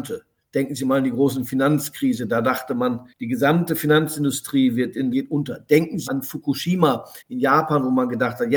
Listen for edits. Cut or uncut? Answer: cut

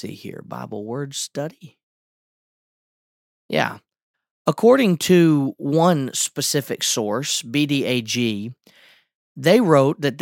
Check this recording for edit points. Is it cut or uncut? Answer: uncut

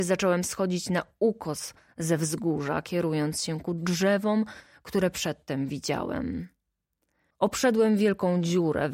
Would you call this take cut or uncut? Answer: uncut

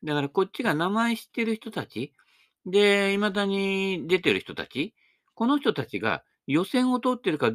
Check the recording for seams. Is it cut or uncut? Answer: uncut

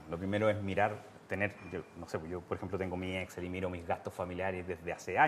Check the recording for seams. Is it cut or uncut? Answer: uncut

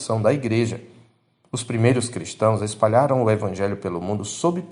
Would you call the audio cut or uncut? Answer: uncut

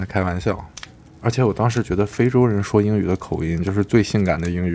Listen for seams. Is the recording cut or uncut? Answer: uncut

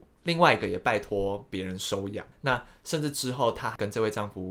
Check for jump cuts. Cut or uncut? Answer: cut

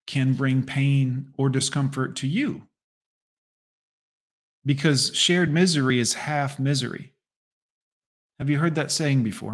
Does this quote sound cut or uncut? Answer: uncut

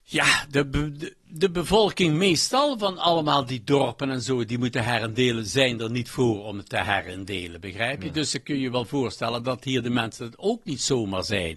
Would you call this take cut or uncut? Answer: uncut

